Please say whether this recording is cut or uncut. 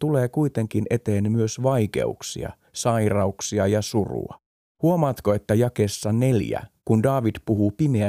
cut